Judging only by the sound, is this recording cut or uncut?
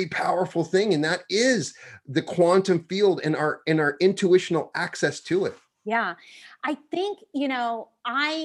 uncut